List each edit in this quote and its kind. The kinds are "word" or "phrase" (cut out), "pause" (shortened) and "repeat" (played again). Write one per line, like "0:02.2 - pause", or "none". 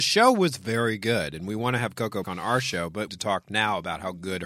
0:02.2 - word
0:03.1 - phrase